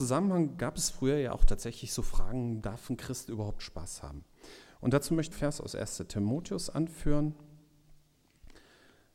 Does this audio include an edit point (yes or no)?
yes